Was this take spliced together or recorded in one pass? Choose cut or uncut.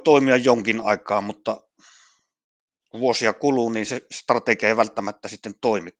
uncut